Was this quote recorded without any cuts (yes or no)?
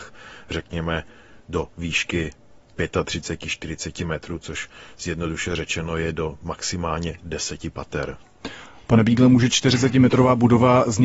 yes